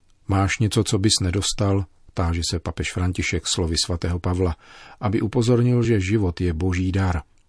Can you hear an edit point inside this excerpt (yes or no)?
no